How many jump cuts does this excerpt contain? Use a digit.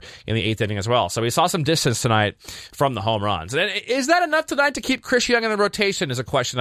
0